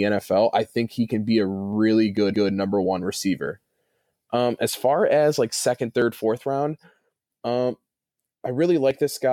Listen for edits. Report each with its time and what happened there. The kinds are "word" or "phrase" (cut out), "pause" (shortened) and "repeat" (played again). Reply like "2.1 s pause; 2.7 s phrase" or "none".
2.3 s repeat